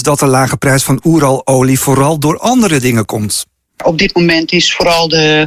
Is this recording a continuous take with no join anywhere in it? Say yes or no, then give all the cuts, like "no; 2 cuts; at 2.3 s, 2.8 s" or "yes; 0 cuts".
yes; 0 cuts